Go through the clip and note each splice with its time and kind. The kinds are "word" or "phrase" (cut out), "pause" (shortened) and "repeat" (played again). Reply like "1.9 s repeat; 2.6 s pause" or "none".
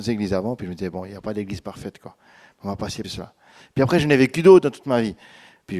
3.0 s word